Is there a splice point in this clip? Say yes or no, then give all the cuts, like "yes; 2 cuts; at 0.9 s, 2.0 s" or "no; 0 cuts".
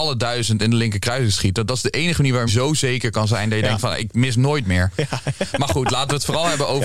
yes; 1 cut; at 2.5 s